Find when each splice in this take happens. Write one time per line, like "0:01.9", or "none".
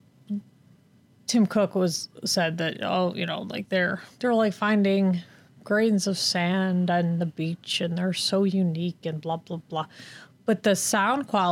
0:05.5